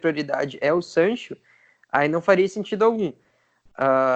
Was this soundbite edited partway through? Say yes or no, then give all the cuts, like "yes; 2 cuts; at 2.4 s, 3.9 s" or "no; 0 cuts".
no; 0 cuts